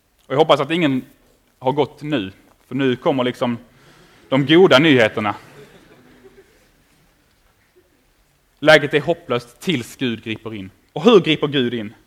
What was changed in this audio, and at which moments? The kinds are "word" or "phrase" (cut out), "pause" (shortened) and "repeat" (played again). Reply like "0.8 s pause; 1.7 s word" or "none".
none